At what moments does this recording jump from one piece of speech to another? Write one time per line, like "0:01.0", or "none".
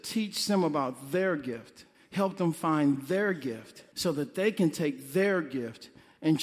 0:01.9
0:03.9

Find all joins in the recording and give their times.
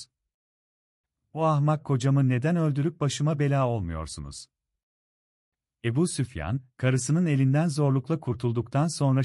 none

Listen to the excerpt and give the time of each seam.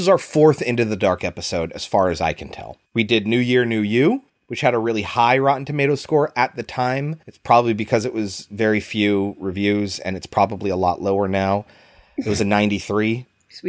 0:02.9
0:04.3
0:07.2

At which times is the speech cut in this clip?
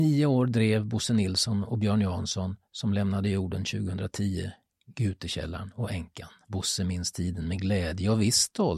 none

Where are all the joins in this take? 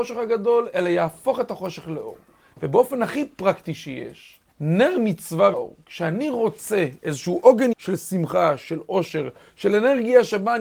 0:04.5
0:05.5
0:07.7

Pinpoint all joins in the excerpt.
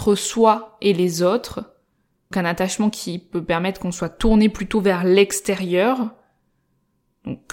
0:02.3

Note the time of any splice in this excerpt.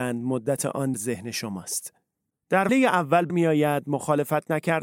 0:00.9
0:02.7
0:03.3

